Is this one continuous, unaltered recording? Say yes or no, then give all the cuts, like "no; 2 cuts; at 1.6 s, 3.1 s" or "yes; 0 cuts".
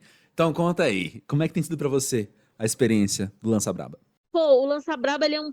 yes; 0 cuts